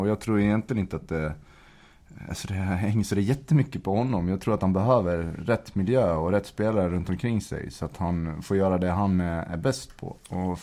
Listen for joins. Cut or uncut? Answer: uncut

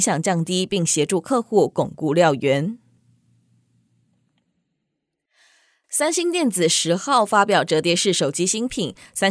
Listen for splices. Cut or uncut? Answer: uncut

